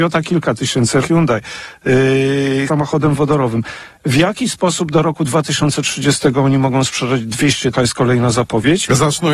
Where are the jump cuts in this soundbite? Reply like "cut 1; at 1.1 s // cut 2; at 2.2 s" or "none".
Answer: cut 1; at 1.0 s // cut 2; at 2.7 s // cut 3; at 7.7 s